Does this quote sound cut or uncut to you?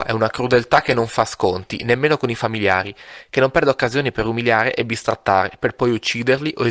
uncut